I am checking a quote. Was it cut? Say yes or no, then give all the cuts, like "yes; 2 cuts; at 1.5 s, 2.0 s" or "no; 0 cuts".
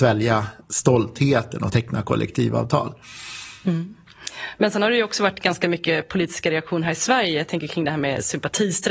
no; 0 cuts